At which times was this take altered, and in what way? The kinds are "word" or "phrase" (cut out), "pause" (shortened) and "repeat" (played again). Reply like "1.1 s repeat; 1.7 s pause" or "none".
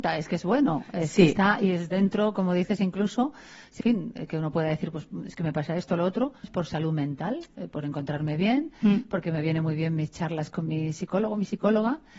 3.8 s phrase; 6.4 s phrase